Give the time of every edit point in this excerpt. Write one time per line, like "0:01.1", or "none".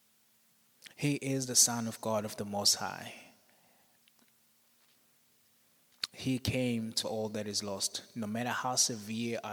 0:07.0